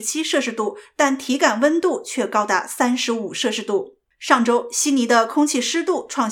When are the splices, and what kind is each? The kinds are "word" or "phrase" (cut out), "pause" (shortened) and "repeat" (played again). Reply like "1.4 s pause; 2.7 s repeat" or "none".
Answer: 4.1 s pause